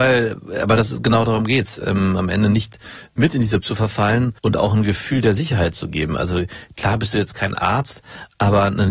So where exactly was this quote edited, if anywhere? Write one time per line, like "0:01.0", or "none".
0:03.6
0:04.4